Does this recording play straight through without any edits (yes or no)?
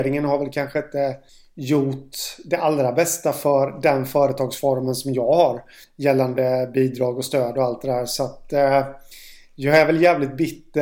no